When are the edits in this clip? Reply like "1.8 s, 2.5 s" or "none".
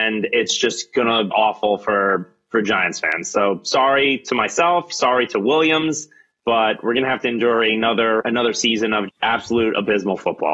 1.3 s, 8.2 s, 9.1 s